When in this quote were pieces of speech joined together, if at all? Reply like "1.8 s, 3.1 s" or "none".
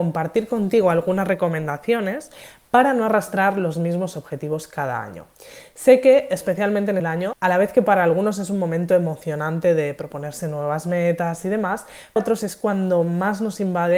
7.0 s, 12.2 s